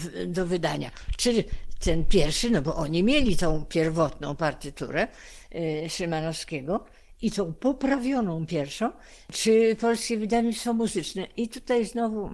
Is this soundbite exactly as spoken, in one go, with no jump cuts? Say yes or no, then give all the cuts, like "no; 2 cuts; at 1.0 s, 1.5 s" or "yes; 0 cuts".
yes; 0 cuts